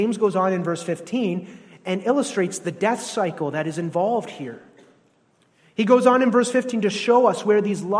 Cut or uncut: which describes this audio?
uncut